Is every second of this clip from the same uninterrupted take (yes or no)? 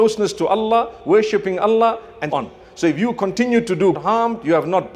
no